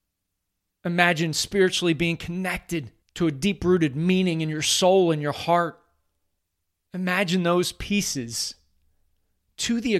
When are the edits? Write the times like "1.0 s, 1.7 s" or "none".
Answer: 3.0 s, 6.4 s